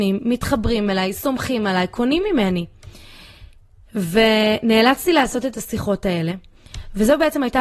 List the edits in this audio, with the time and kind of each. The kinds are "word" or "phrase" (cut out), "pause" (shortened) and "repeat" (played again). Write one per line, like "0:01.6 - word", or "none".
none